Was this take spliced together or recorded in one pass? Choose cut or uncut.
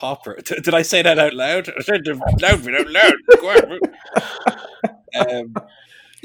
uncut